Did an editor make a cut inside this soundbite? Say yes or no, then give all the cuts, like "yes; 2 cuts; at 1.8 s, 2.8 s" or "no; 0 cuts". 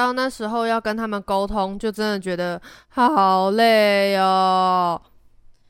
no; 0 cuts